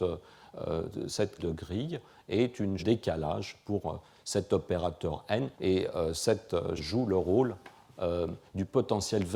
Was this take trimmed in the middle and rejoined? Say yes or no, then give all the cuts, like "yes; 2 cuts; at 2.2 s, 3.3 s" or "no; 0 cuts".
yes; 4 cuts; at 1.4 s, 2.8 s, 5.5 s, 6.8 s